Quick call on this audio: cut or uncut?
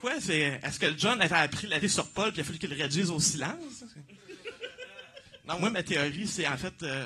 cut